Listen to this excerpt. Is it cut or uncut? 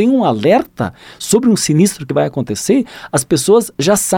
uncut